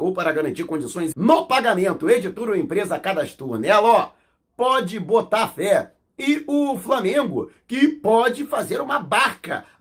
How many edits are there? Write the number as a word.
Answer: one